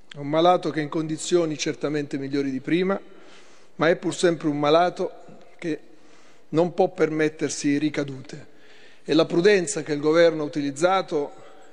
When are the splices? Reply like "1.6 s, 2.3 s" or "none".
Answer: none